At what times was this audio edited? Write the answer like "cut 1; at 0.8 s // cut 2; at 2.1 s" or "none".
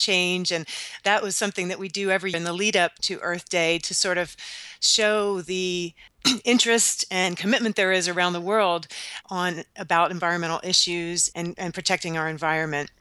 cut 1; at 2.3 s // cut 2; at 3.0 s // cut 3; at 9.2 s // cut 4; at 11.3 s